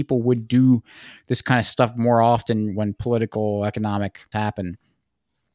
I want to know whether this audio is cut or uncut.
cut